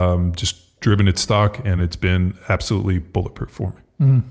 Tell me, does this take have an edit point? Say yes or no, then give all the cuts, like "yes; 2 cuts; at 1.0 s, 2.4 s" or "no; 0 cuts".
no; 0 cuts